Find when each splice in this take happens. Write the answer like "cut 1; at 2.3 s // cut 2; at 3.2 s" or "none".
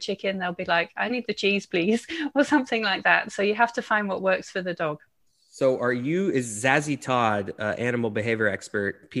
none

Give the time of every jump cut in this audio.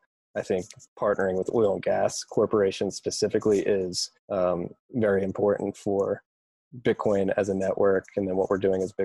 cut 1; at 4.2 s

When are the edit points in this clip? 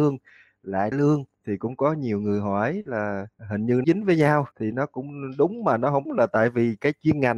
cut 1; at 0.9 s // cut 2; at 1.3 s // cut 3; at 3.3 s // cut 4; at 3.8 s // cut 5; at 4.5 s // cut 6; at 6.1 s

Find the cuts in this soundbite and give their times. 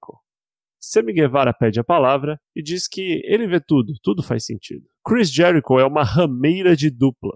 cut 1; at 2.4 s // cut 2; at 5.0 s

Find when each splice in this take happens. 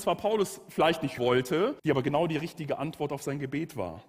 cut 1; at 1.2 s // cut 2; at 1.8 s

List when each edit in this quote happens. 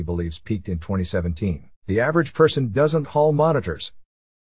cut 1; at 1.8 s // cut 2; at 3.0 s

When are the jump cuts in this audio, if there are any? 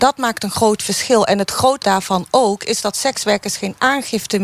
cut 1; at 1.8 s

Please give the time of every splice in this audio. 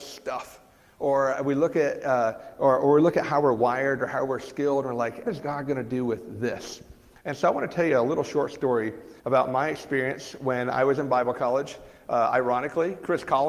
cut 1; at 5.3 s // cut 2; at 9.2 s

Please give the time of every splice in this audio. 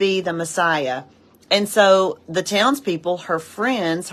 none

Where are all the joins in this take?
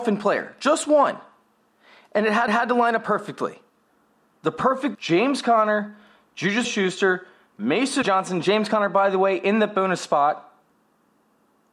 cut 1; at 2.5 s // cut 2; at 4.9 s // cut 3; at 6.6 s // cut 4; at 8.0 s

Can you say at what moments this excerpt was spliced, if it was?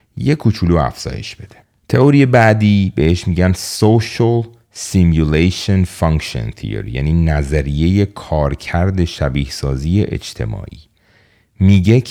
cut 1; at 1.6 s

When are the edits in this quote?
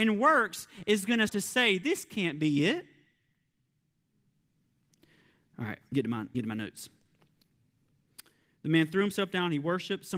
cut 1; at 1.3 s // cut 2; at 5.9 s // cut 3; at 6.3 s

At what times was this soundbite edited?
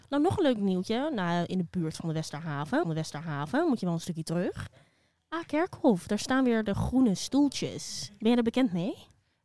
cut 1; at 2.8 s

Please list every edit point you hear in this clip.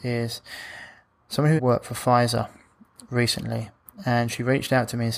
cut 1; at 1.6 s

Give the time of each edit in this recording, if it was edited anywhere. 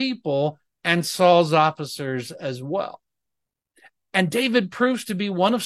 none

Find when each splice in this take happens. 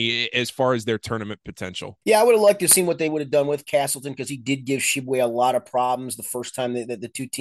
cut 1; at 2.0 s

